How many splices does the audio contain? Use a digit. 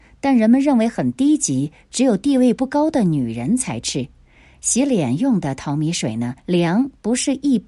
1